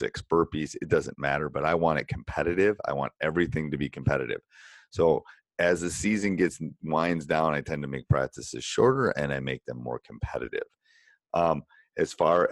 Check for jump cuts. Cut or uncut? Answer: uncut